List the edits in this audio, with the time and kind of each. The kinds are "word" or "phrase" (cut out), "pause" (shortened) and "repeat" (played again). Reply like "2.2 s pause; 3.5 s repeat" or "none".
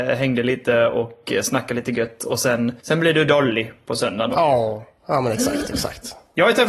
2.8 s pause